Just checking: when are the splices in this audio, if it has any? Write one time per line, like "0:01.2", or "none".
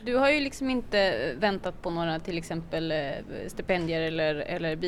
none